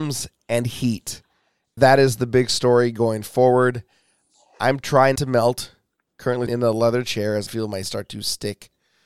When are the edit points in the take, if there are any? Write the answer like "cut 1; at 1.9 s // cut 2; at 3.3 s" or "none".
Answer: cut 1; at 1.8 s // cut 2; at 5.2 s // cut 3; at 6.5 s // cut 4; at 7.5 s // cut 5; at 7.8 s